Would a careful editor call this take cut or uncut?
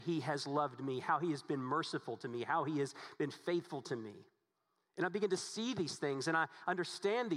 uncut